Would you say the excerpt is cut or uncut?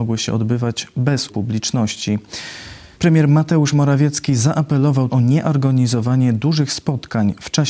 cut